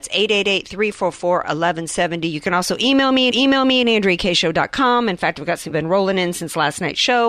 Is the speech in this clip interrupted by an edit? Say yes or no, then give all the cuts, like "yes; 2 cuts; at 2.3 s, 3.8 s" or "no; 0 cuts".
yes; 2 cuts; at 3.3 s, 5.7 s